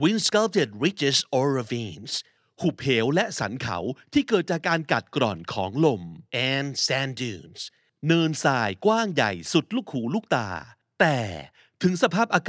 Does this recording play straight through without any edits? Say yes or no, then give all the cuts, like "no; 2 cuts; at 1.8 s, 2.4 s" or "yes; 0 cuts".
yes; 0 cuts